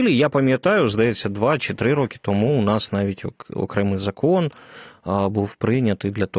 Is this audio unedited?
yes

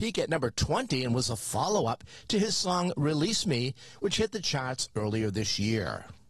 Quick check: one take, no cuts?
yes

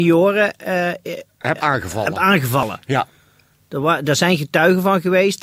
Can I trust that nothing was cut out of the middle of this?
yes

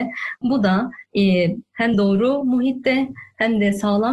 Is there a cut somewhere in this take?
no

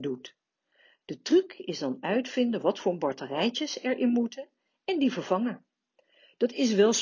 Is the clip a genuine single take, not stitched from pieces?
yes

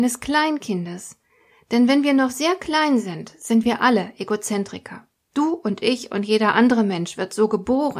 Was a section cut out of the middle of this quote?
no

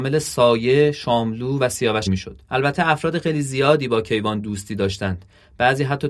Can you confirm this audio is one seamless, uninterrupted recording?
no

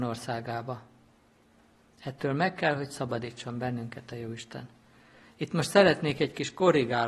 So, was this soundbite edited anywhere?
no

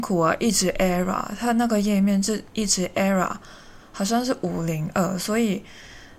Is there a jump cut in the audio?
no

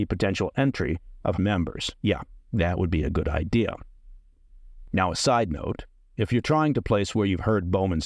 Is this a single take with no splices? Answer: no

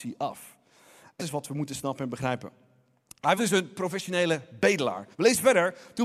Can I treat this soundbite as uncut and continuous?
no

